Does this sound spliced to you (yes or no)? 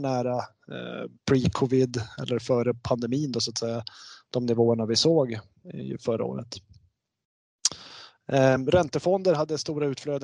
no